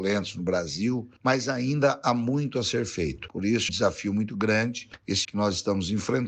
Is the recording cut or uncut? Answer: cut